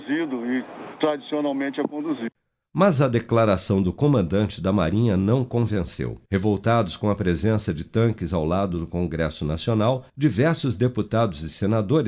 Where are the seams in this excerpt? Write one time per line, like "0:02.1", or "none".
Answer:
0:06.3
0:10.1

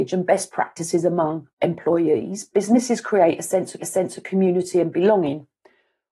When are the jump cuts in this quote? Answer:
0:01.5
0:03.8

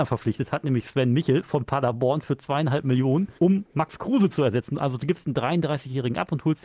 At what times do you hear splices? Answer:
0:03.4

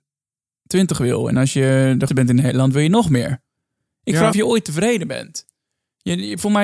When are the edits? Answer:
0:02.1
0:04.3

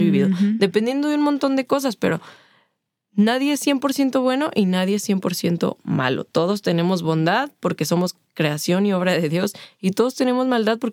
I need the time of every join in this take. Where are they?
none

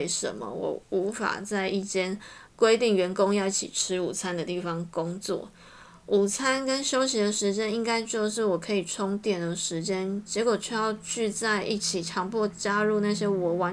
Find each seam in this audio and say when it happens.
0:02.5

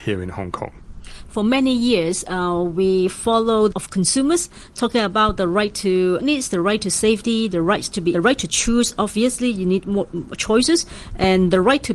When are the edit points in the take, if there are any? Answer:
0:03.7
0:06.2
0:08.1

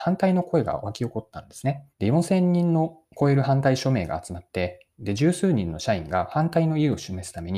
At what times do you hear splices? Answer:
0:01.9

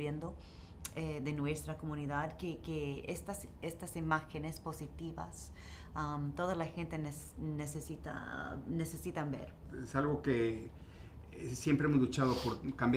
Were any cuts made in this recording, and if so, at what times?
none

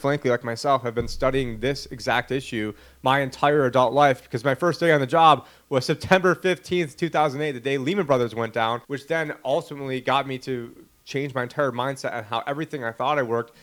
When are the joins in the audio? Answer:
0:08.8

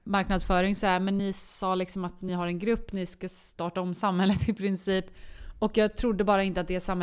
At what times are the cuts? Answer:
none

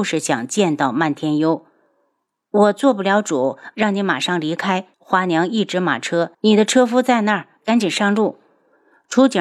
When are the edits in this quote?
0:03.7
0:04.9
0:06.3

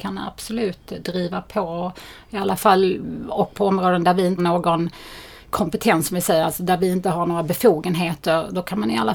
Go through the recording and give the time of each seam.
0:03.5
0:04.4

